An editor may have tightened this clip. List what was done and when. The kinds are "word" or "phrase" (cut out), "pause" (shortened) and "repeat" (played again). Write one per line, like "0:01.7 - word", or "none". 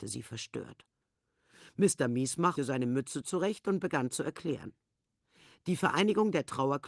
0:02.6 - word